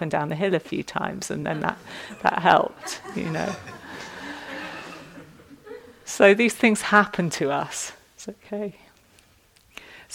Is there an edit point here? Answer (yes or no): no